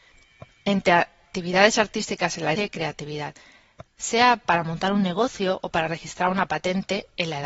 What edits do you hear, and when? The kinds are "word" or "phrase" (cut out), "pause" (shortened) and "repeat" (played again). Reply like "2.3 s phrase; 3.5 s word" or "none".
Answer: 2.6 s word; 3.9 s pause